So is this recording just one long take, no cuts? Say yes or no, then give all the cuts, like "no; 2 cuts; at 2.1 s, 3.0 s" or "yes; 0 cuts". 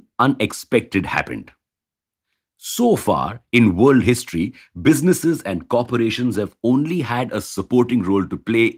yes; 0 cuts